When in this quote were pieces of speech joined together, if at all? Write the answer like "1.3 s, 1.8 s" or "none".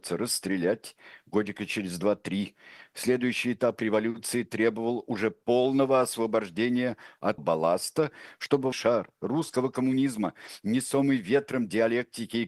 7.4 s, 8.7 s